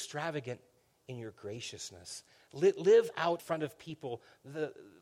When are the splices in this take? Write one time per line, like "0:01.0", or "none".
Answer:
0:03.4